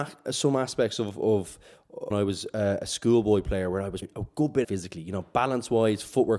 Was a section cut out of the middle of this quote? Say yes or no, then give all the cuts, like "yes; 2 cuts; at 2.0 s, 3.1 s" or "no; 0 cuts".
yes; 3 cuts; at 2.1 s, 4.0 s, 4.6 s